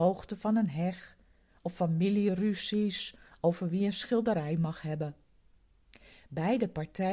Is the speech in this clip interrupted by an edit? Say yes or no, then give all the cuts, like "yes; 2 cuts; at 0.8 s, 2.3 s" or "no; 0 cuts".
no; 0 cuts